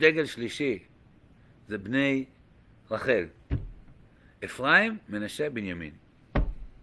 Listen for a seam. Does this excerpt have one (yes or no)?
no